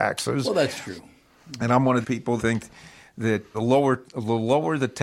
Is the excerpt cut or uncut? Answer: cut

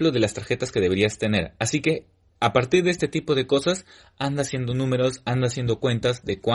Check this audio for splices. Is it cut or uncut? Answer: uncut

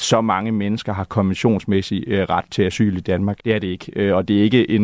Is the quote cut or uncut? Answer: cut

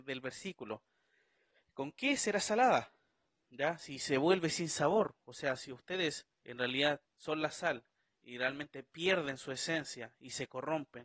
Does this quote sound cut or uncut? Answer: cut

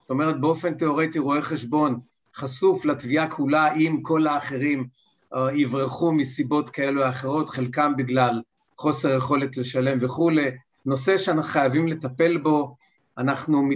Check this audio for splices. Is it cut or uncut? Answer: uncut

